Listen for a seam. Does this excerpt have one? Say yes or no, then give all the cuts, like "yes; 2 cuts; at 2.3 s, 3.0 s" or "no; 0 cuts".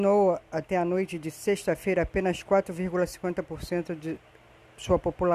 no; 0 cuts